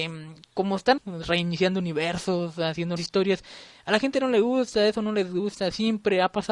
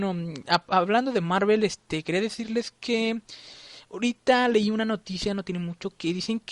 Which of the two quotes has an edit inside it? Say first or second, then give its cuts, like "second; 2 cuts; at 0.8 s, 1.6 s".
first; 2 cuts; at 1.0 s, 3.0 s